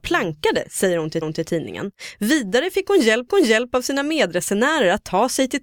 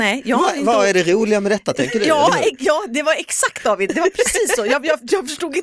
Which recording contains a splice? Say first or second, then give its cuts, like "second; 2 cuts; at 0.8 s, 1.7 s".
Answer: first; 2 cuts; at 1.2 s, 3.3 s